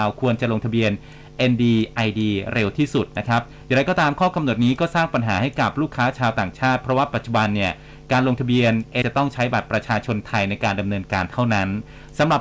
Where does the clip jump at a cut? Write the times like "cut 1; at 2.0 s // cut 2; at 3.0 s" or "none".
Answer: cut 1; at 9.0 s

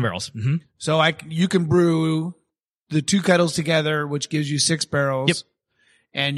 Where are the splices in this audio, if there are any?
none

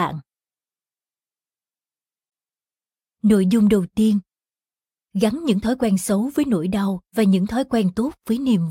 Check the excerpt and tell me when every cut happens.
cut 1; at 4.5 s // cut 2; at 7.1 s

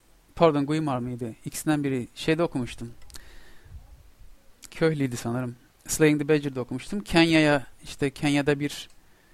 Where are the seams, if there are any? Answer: cut 1; at 5.8 s

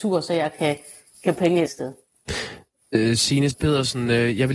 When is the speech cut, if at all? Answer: cut 1; at 1.4 s // cut 2; at 1.7 s // cut 3; at 3.5 s

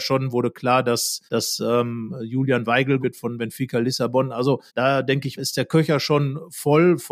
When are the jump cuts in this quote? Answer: cut 1; at 1.3 s // cut 2; at 3.0 s // cut 3; at 4.7 s // cut 4; at 5.4 s

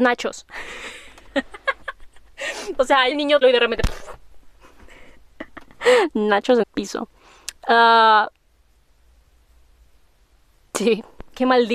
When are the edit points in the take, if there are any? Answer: cut 1; at 3.1 s // cut 2; at 3.4 s // cut 3; at 4.5 s // cut 4; at 6.6 s

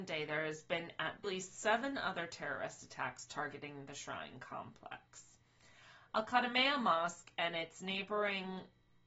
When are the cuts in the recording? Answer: cut 1; at 1.2 s

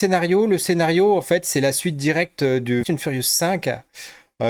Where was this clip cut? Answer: cut 1; at 2.8 s

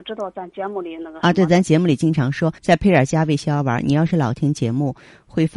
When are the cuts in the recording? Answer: cut 1; at 2.6 s

